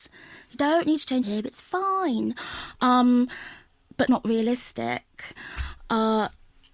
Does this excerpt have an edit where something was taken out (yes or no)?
yes